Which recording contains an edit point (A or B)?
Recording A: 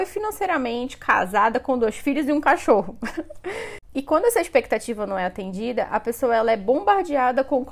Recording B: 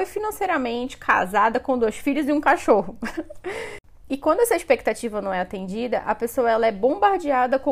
A